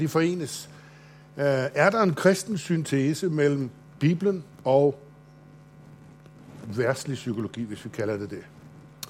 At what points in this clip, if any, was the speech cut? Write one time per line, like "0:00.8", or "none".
0:04.5